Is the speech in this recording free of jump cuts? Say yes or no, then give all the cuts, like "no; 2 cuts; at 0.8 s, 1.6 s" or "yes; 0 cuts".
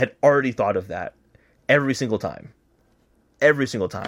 yes; 0 cuts